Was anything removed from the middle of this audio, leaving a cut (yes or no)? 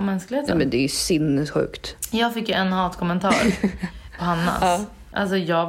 yes